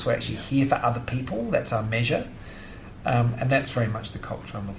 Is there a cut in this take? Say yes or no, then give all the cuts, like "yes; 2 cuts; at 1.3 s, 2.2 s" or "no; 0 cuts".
no; 0 cuts